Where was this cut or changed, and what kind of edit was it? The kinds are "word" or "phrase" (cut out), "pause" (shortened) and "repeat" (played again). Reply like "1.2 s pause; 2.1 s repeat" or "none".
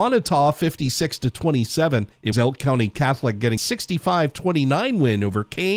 2.3 s word; 3.6 s word